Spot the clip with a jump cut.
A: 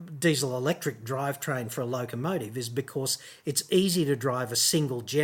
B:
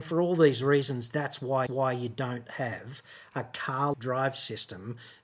B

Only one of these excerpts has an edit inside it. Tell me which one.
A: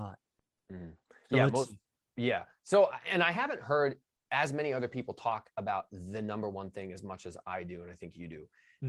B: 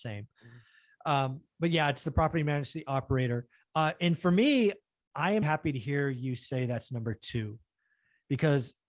B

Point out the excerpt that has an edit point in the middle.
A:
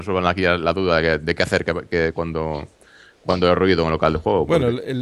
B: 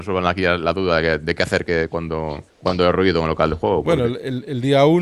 B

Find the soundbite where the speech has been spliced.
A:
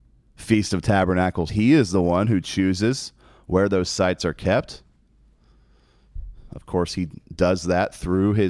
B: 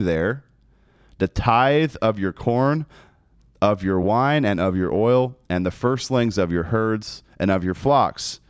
A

